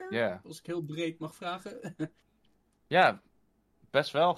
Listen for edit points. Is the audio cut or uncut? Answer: cut